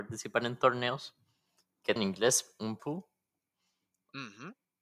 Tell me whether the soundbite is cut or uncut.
cut